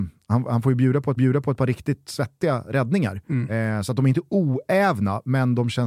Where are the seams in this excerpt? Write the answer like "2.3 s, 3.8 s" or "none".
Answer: 1.2 s